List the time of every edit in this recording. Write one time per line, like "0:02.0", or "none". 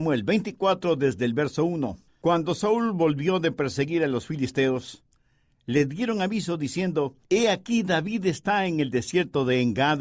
0:02.1
0:07.2